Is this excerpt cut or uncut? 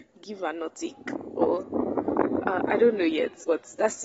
uncut